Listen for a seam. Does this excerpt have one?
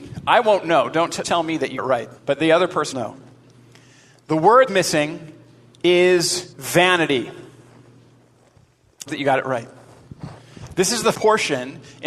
yes; 8 cuts; at 1.2 s, 1.8 s, 2.2 s, 2.9 s, 4.7 s, 6.5 s, 9.1 s, 11.1 s

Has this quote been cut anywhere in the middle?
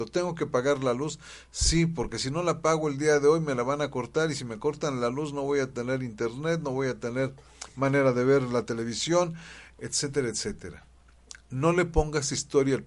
no; 0 cuts

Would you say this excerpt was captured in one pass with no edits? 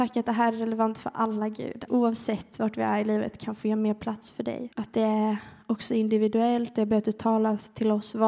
no; 2 cuts; at 1.9 s, 4.7 s

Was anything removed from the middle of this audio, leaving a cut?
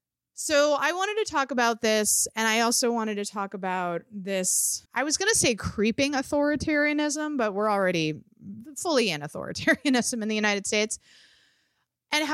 yes; 1 cut; at 4.8 s

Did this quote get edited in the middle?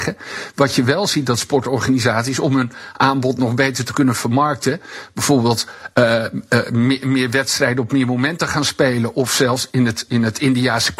no; 0 cuts

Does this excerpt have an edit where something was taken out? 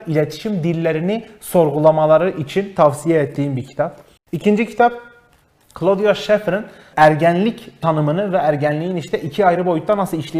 yes; 1 cut; at 4.2 s

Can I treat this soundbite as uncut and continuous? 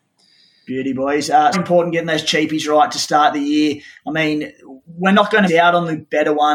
no; 2 cuts; at 1.5 s, 5.5 s

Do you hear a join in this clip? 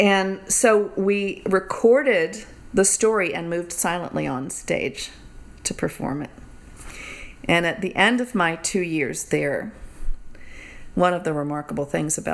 yes; 1 cut; at 10.9 s

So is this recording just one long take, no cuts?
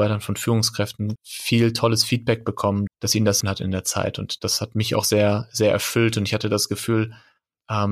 no; 3 cuts; at 1.2 s, 2.9 s, 3.4 s

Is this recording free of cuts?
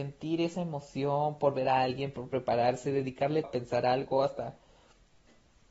no; 1 cut; at 3.4 s

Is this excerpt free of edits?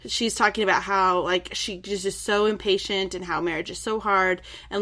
yes; 0 cuts

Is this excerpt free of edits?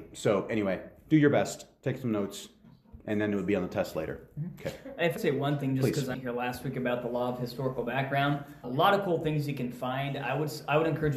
no; 3 cuts; at 5.2 s, 6.1 s, 8.6 s

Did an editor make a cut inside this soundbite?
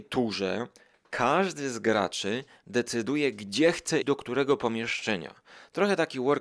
yes; 1 cut; at 4.0 s

